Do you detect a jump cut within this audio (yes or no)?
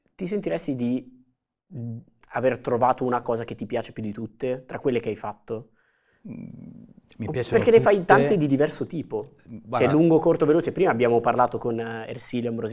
no